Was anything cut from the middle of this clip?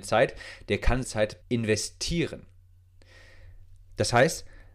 yes; 2 cuts; at 1.0 s, 1.4 s

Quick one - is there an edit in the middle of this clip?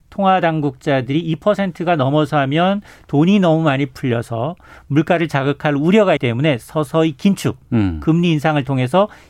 yes; 1 cut; at 6.2 s

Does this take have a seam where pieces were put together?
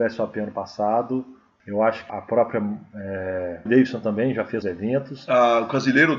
yes; 3 cuts; at 2.1 s, 3.7 s, 4.6 s

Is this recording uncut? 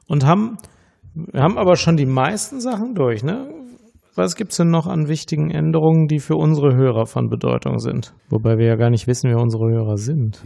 no; 1 cut; at 8.2 s

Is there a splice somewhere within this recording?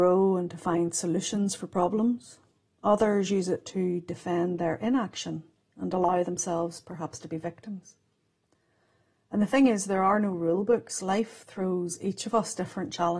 no; 0 cuts

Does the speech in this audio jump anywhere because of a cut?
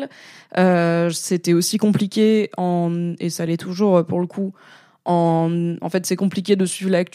no; 0 cuts

